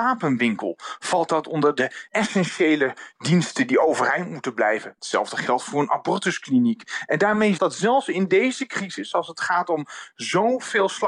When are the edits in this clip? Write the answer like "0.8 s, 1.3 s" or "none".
2.1 s, 7.6 s